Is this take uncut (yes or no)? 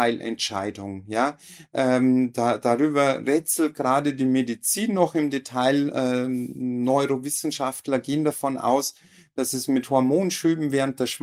yes